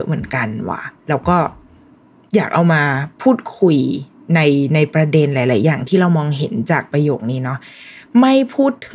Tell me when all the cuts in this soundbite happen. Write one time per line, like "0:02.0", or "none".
none